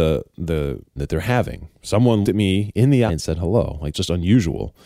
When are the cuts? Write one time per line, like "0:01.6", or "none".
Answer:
0:01.0
0:02.2
0:03.1
0:03.9